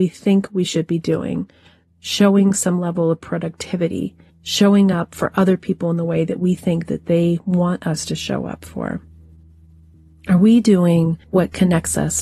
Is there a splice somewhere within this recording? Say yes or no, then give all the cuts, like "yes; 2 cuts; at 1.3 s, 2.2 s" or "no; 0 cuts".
no; 0 cuts